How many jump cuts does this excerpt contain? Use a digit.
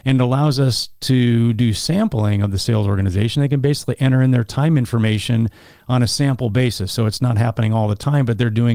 0